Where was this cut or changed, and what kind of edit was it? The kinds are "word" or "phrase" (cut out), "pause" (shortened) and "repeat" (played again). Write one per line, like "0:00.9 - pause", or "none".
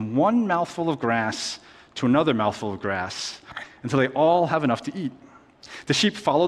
none